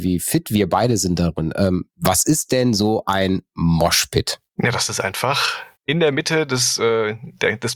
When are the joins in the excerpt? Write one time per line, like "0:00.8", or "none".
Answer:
0:01.9
0:04.5
0:05.7